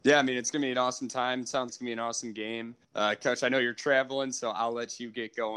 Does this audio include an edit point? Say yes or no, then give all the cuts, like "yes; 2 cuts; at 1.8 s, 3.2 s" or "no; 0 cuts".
yes; 2 cuts; at 1.7 s, 2.8 s